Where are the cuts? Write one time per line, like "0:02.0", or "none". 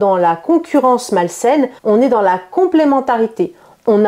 0:01.8